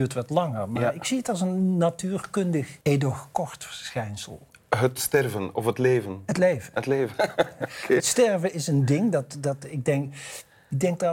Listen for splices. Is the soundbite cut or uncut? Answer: cut